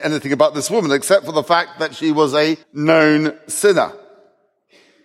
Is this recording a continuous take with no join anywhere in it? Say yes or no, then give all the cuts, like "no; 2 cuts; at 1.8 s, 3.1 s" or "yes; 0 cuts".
no; 1 cut; at 2.6 s